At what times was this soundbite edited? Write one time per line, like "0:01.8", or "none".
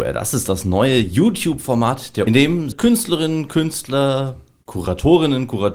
0:02.3
0:02.7